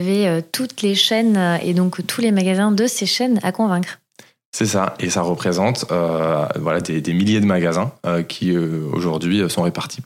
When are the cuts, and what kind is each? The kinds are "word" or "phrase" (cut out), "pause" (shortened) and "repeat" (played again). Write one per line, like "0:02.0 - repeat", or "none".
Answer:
none